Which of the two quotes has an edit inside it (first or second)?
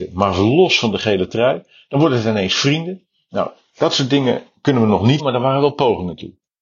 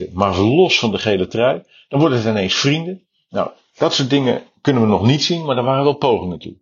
first